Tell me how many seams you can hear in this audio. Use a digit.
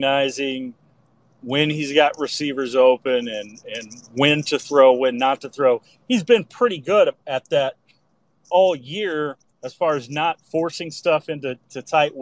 0